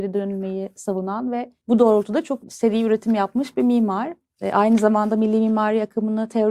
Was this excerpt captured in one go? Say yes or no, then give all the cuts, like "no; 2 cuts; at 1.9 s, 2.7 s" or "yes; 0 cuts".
no; 2 cuts; at 1.6 s, 2.4 s